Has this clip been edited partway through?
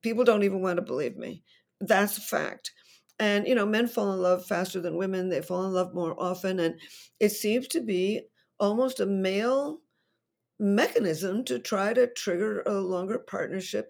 no; 0 cuts

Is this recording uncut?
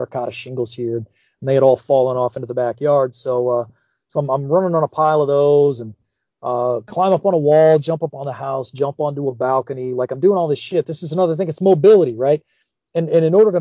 yes; 0 cuts

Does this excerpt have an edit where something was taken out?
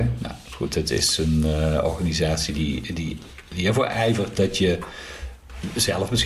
no; 0 cuts

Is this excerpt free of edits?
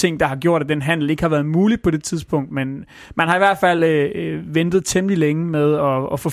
yes; 0 cuts

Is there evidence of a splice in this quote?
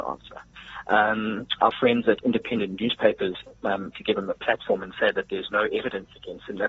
yes; 1 cut; at 3.9 s

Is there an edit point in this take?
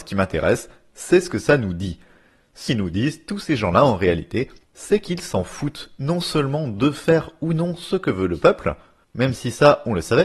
yes; 1 cut; at 2.7 s

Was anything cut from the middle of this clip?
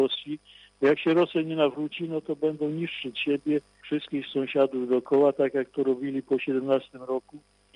no; 0 cuts

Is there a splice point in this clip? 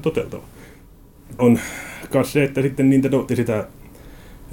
yes; 2 cuts; at 1.4 s, 3.3 s

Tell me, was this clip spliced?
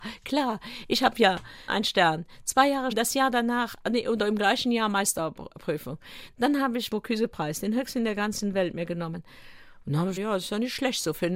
yes; 4 cuts; at 1.7 s, 2.9 s, 6.9 s, 10.2 s

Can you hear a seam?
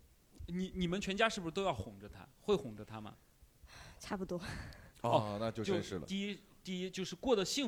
yes; 1 cut; at 2.3 s

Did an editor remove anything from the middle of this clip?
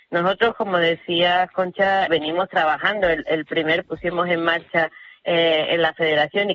yes; 2 cuts; at 2.1 s, 3.8 s

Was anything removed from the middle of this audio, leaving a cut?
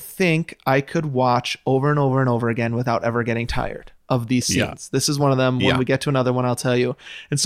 yes; 1 cut; at 4.0 s

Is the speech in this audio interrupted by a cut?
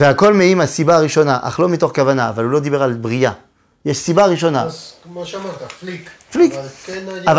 no; 0 cuts

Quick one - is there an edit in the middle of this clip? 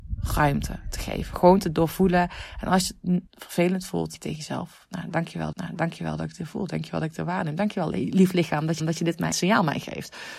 yes; 5 cuts; at 3.3 s, 4.1 s, 5.5 s, 8.8 s, 9.3 s

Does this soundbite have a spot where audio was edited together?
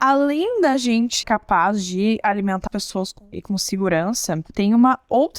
yes; 3 cuts; at 1.2 s, 2.7 s, 3.3 s

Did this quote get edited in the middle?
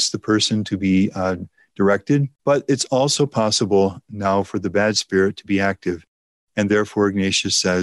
yes; 1 cut; at 2.4 s

